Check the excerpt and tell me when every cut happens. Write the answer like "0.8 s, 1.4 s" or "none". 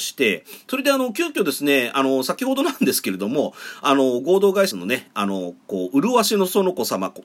4.7 s